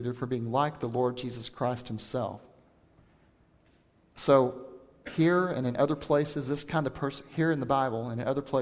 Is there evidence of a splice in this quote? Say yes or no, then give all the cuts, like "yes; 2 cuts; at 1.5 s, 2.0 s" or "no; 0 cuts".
no; 0 cuts